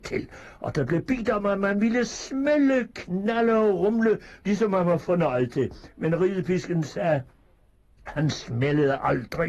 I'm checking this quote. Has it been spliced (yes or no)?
no